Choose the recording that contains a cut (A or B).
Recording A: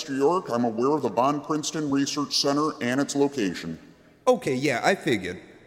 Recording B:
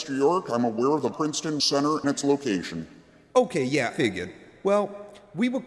B